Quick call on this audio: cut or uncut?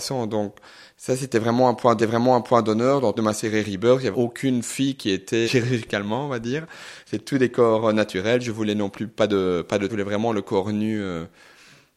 cut